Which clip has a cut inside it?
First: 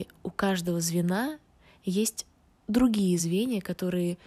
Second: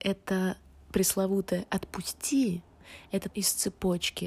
second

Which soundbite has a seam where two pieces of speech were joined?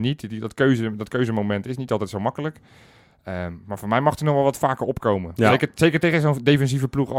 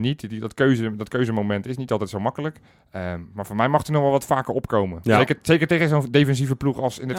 second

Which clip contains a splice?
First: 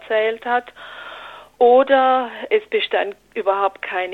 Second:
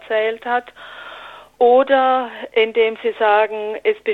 first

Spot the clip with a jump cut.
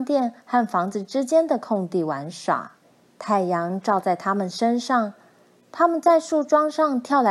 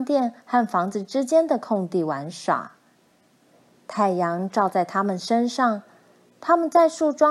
first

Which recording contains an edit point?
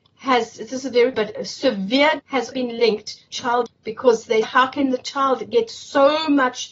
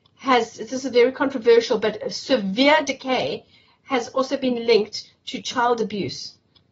first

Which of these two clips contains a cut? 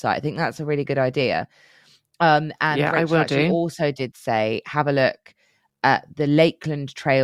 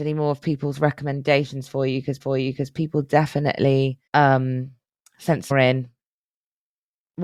second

